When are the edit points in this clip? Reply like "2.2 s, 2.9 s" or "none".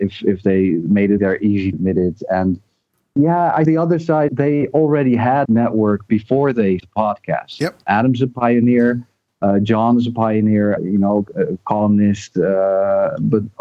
1.2 s, 1.7 s, 3.7 s, 4.3 s, 5.5 s, 6.8 s, 7.8 s, 10.8 s, 11.3 s